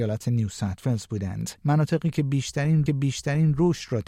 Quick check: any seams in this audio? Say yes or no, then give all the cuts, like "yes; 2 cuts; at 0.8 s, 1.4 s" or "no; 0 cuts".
yes; 2 cuts; at 1.6 s, 2.9 s